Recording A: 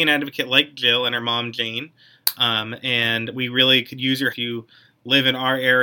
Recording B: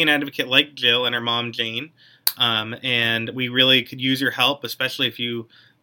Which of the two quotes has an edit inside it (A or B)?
A